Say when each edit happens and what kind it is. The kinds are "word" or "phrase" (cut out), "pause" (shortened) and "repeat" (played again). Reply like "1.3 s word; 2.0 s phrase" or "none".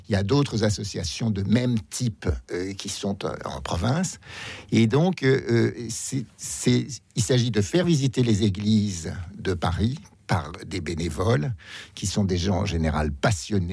none